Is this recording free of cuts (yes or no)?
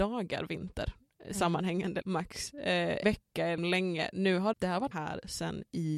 no